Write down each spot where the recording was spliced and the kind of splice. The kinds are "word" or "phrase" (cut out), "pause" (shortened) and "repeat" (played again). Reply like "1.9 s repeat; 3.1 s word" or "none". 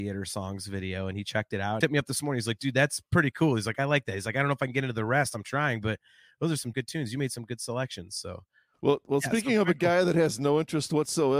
1.8 s phrase; 6.7 s word